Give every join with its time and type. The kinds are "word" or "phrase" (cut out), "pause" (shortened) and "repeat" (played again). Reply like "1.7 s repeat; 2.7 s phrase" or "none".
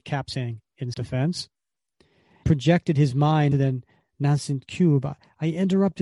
0.9 s word; 2.4 s word; 3.5 s word